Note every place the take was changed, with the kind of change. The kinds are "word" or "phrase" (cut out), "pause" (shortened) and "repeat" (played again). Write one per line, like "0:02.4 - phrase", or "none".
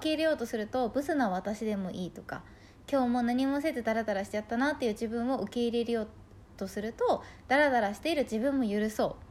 none